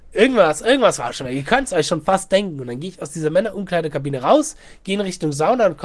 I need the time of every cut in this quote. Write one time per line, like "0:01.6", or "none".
none